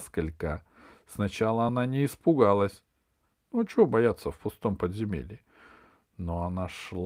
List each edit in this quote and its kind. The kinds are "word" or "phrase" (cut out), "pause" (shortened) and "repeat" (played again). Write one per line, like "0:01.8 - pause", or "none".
none